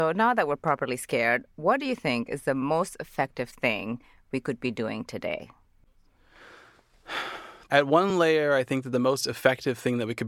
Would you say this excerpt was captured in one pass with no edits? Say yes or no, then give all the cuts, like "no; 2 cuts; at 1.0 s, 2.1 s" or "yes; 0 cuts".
yes; 0 cuts